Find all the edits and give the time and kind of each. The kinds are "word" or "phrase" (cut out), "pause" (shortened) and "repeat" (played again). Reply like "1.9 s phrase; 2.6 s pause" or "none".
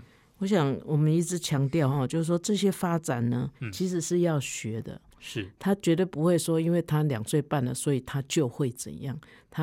3.5 s pause